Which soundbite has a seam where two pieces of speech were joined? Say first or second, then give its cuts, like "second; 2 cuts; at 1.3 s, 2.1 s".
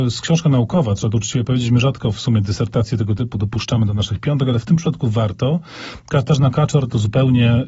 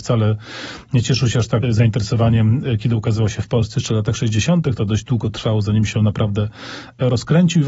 second; 1 cut; at 1.6 s